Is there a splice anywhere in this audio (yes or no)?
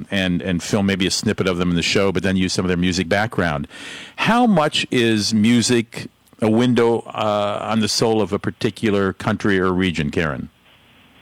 yes